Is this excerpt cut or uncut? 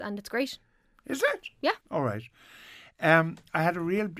cut